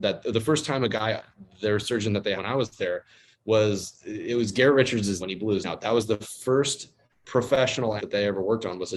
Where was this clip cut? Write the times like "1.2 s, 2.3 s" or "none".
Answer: 2.4 s, 5.2 s, 5.6 s, 8.0 s